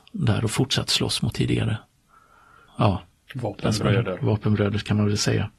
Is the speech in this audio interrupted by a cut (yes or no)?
yes